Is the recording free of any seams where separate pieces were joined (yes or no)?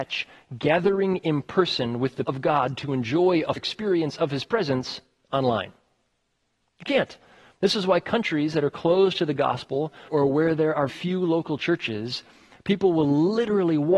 no